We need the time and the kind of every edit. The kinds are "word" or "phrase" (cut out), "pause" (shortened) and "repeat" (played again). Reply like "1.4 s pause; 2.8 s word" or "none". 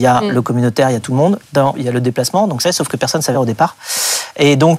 1.7 s word; 2.6 s word; 3.3 s word